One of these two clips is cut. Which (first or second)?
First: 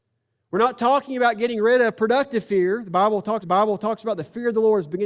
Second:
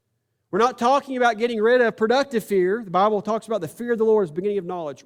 first